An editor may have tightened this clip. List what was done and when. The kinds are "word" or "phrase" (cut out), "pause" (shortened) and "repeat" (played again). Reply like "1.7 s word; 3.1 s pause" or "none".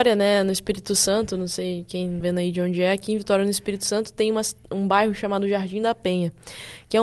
2.2 s word